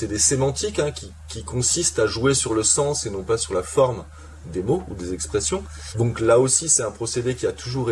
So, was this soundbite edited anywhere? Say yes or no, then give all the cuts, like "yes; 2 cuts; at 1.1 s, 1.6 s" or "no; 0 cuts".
no; 0 cuts